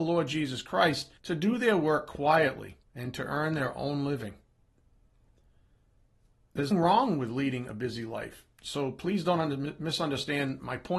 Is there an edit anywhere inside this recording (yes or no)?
yes